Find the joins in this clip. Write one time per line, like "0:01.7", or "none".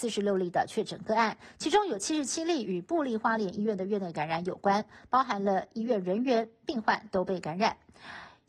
none